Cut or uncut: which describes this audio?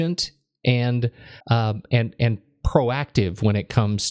cut